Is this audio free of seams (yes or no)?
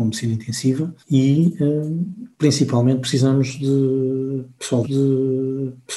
no